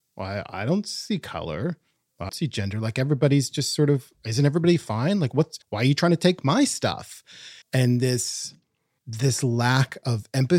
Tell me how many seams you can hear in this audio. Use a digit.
3